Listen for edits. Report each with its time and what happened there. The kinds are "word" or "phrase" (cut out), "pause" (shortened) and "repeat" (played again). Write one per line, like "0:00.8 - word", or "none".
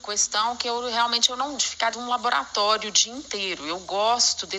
0:01.6 - word
0:01.9 - word